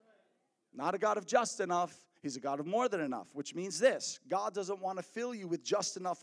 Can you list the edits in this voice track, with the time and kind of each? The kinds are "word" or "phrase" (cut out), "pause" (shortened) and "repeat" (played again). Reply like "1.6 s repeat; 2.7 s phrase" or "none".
2.2 s pause